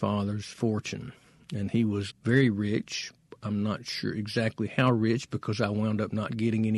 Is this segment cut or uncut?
cut